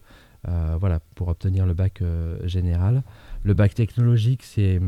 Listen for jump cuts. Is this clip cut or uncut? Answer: uncut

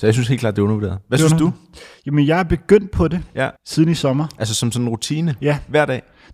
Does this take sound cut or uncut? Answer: cut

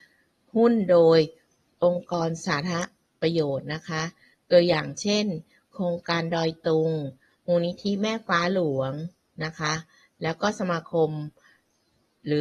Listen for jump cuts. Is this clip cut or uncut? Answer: uncut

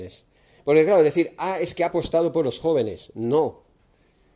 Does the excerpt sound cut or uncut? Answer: uncut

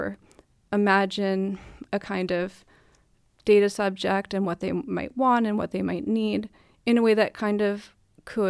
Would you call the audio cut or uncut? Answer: uncut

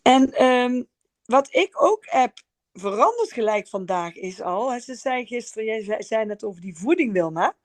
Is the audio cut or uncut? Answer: uncut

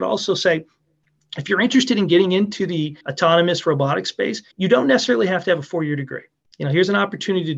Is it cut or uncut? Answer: cut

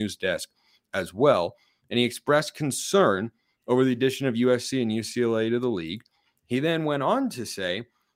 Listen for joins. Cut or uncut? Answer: uncut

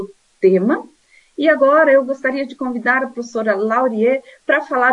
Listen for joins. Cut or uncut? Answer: uncut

